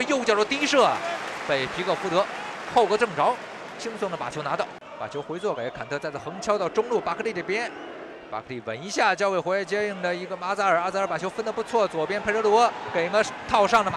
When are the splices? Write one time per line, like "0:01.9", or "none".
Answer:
0:01.4